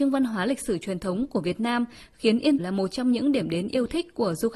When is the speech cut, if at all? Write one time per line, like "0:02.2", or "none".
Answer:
0:02.6